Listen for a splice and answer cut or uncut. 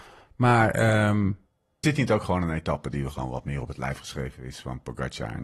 cut